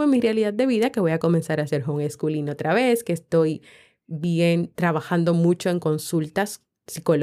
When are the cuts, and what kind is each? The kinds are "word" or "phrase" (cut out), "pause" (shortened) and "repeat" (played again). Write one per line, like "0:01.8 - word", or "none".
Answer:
none

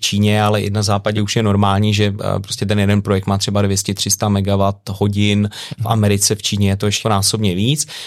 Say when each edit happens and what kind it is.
0:01.1 - word
0:07.0 - word

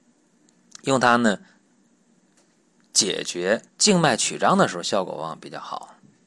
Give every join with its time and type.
0:03.7 - pause

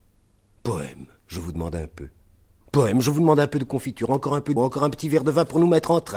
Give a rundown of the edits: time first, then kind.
0:04.6 - word

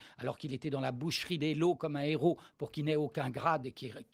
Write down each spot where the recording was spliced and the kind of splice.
none

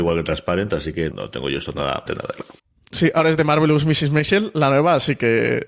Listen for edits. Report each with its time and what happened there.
0:01.1 - word
0:02.1 - word
0:02.6 - pause

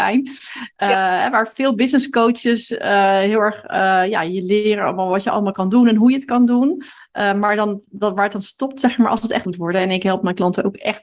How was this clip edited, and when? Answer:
0:09.4 - word

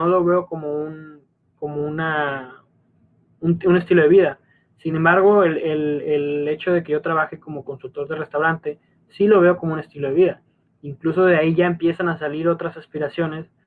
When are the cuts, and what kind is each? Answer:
none

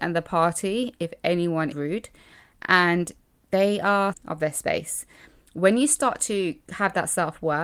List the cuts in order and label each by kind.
0:01.7 - word
0:04.1 - word

